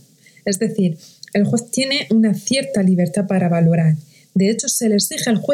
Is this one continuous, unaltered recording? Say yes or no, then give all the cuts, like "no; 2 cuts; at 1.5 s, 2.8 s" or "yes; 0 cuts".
yes; 0 cuts